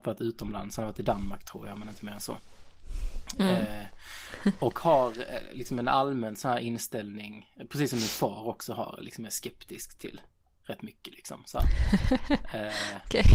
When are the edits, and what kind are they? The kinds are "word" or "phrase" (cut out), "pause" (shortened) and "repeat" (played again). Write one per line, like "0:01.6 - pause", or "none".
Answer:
none